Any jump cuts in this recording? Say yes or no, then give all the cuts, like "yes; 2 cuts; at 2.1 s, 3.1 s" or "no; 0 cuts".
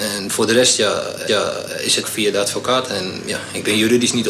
yes; 2 cuts; at 1.3 s, 2.0 s